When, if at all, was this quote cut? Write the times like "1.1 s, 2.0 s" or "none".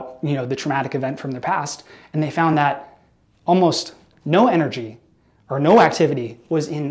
none